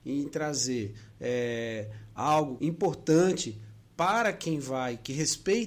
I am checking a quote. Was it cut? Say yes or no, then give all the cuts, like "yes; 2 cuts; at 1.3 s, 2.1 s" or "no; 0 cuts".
yes; 2 cuts; at 2.6 s, 3.9 s